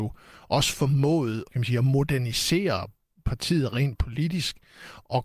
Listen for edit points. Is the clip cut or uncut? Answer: cut